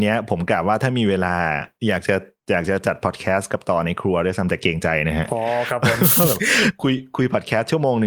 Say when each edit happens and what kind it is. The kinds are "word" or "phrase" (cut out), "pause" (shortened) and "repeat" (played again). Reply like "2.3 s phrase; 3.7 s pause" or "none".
1.8 s pause